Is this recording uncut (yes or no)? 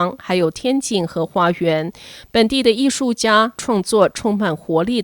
no